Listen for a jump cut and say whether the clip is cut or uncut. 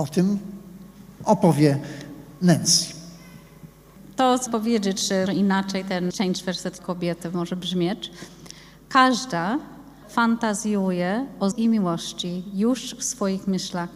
cut